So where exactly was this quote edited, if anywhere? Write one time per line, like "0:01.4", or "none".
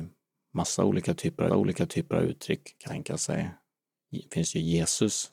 0:01.5
0:02.9